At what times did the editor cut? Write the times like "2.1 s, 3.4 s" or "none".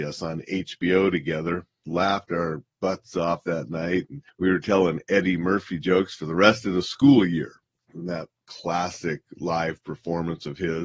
1.8 s